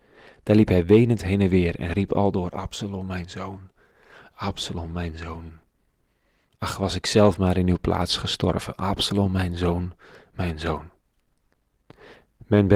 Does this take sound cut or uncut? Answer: uncut